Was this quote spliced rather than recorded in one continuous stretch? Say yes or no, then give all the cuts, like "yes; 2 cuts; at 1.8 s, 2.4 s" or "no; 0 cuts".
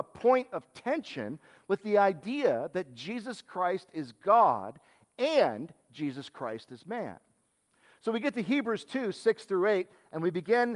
no; 0 cuts